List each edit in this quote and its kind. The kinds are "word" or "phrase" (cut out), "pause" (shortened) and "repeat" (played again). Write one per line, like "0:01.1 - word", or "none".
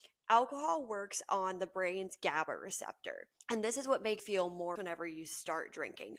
0:04.2 - word
0:04.8 - word